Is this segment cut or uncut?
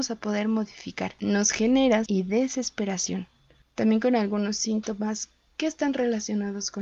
cut